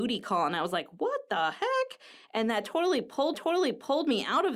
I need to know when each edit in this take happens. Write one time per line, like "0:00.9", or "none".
0:03.3

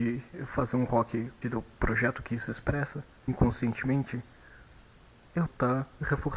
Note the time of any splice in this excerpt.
0:01.4
0:03.3
0:05.5

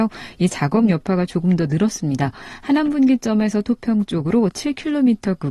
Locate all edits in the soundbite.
none

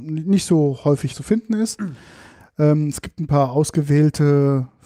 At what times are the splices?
0:01.1

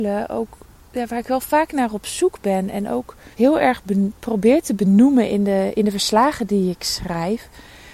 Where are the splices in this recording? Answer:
0:03.3

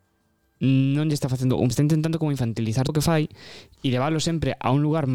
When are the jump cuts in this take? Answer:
0:01.7
0:02.9

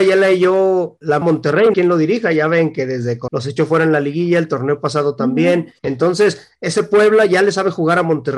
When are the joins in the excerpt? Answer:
0:01.2
0:01.7
0:03.3
0:05.8

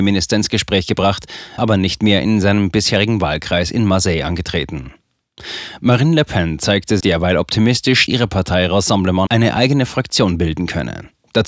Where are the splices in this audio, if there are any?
0:01.6
0:07.0
0:08.1
0:09.3

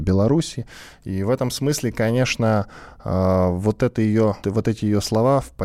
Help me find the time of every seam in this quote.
0:04.4

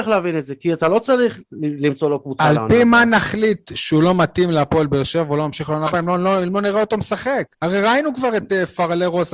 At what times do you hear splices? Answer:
0:07.5

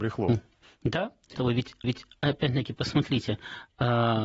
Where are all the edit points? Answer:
0:01.3
0:01.8

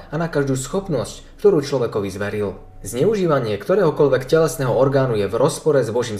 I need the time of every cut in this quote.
none

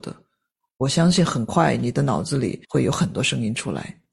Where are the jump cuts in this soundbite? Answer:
0:02.6

